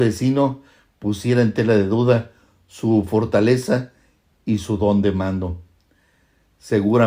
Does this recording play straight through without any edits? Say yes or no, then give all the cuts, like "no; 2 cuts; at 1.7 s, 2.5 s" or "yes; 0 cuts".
yes; 0 cuts